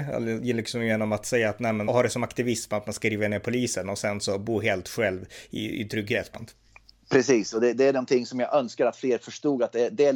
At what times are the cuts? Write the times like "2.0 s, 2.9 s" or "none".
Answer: 1.9 s, 6.3 s